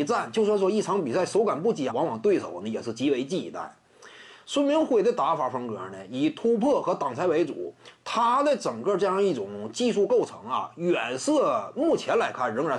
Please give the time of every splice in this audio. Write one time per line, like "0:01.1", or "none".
0:01.9